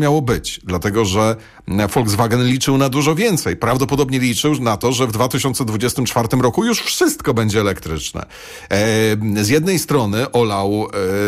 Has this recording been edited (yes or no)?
no